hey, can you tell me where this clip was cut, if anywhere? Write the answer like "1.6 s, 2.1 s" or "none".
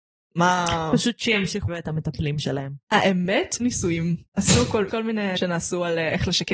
1.7 s, 3.6 s, 4.3 s, 4.9 s, 5.4 s